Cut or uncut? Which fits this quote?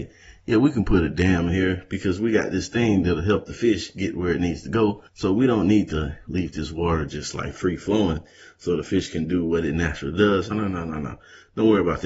cut